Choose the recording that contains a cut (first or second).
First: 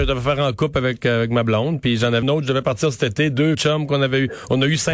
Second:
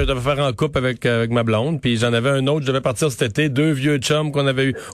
first